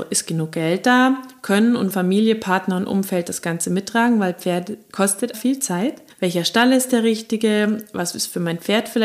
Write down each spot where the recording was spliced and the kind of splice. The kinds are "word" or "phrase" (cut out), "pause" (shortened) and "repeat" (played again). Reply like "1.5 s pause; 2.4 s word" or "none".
1.9 s word; 5.3 s word; 6.1 s pause